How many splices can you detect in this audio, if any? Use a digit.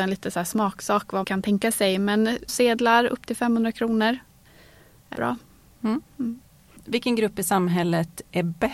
3